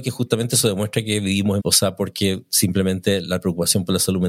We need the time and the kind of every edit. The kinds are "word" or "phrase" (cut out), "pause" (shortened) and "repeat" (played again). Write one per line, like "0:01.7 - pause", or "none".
0:01.6 - phrase